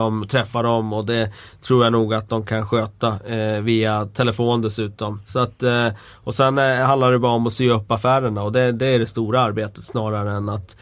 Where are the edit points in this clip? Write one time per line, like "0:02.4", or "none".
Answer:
none